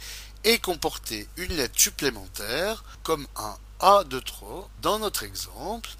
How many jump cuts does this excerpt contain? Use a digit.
1